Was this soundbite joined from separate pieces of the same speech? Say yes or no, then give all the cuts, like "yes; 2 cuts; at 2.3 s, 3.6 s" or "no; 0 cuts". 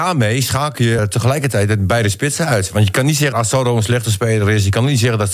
yes; 2 cuts; at 1.0 s, 3.3 s